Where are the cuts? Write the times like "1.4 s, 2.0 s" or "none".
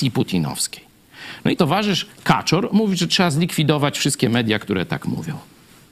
1.6 s, 2.1 s